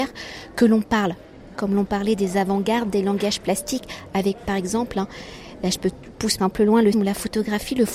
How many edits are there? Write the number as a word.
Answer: three